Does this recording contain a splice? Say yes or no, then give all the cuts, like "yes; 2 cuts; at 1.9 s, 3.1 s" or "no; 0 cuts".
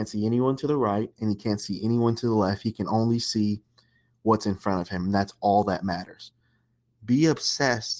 no; 0 cuts